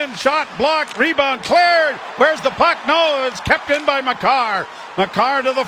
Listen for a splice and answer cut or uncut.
uncut